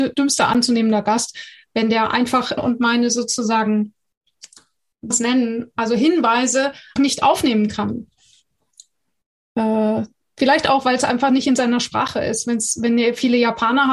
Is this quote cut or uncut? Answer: cut